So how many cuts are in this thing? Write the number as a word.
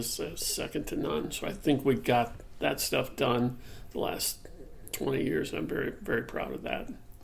zero